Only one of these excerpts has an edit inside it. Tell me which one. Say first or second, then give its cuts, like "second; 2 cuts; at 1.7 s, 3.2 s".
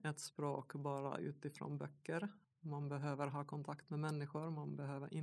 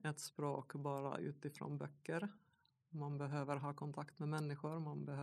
first; 1 cut; at 2.4 s